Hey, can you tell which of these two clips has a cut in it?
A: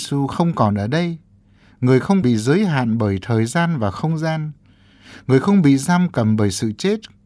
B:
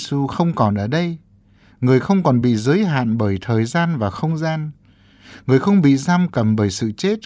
A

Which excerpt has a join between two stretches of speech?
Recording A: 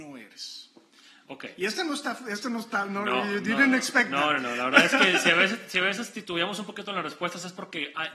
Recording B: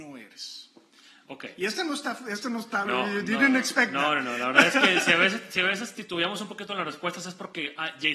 B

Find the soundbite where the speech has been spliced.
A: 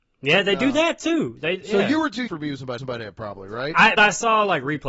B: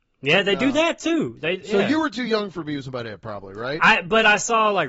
A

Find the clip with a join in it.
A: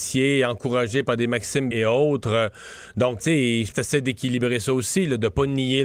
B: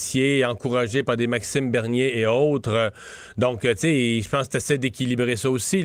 A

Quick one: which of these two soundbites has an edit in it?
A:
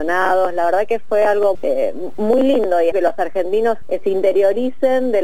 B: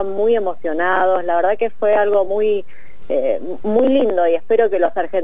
A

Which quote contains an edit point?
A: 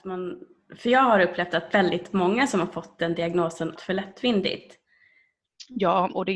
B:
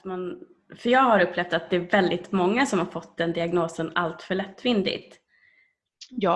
A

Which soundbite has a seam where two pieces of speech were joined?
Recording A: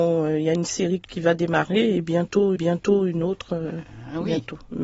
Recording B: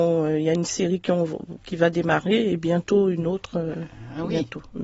A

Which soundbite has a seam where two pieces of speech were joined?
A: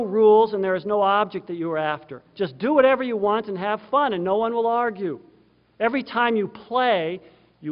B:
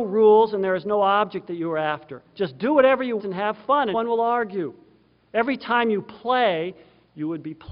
B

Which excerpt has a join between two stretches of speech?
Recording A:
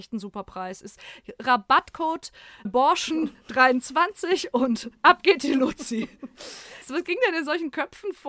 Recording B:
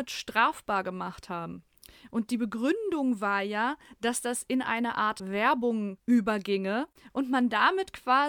A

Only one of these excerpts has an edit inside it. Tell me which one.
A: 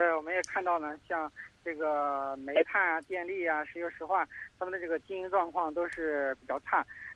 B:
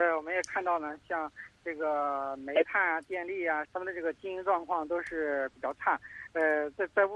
B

